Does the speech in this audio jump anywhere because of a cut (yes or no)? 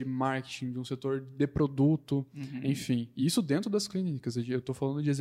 no